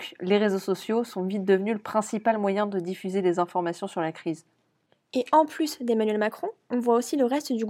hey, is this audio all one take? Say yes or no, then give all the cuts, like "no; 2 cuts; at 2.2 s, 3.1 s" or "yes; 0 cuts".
yes; 0 cuts